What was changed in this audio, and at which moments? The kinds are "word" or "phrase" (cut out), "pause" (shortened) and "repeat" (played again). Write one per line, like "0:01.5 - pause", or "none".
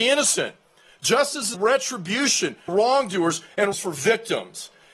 0:01.5 - word
0:02.7 - word
0:03.7 - word